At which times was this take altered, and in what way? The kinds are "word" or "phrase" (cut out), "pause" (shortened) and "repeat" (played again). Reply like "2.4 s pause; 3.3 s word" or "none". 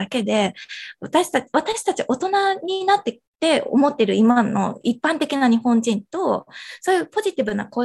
3.3 s pause

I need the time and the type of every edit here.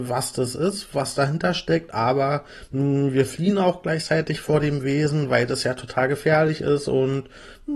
none

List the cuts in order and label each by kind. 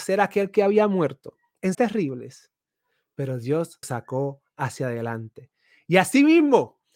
1.7 s word; 3.8 s word

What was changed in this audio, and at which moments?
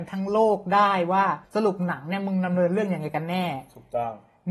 1.4 s pause

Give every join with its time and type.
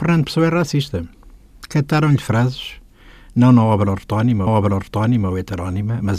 4.5 s repeat

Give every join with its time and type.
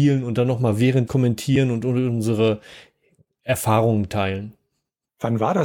1.1 s phrase

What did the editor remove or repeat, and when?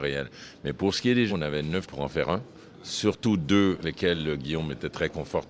1.3 s word; 1.8 s word; 3.8 s word

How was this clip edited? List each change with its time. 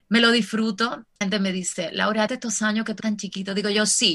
1.2 s phrase; 2.3 s word; 3.0 s phrase

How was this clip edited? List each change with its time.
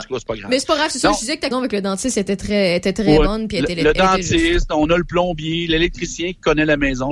1.5 s word

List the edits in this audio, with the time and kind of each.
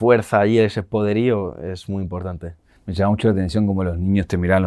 none

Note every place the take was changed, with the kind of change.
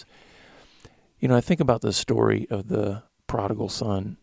none

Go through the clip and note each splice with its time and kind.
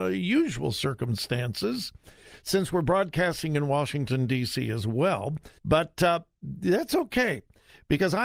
5.6 s pause

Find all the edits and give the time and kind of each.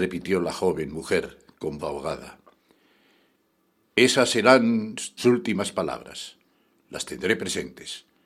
1.8 s word; 5.2 s word

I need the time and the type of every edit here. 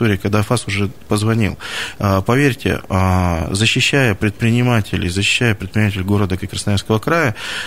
6.4 s word

